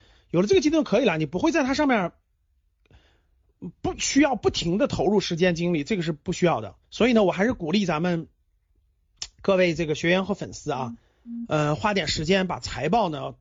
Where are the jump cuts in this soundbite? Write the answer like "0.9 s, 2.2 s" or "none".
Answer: 6.8 s